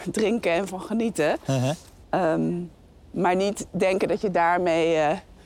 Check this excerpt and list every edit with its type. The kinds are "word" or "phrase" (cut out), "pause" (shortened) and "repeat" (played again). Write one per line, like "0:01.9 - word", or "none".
none